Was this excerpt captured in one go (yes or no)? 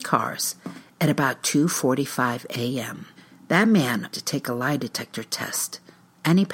no